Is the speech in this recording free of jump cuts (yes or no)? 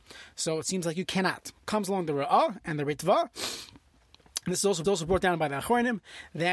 no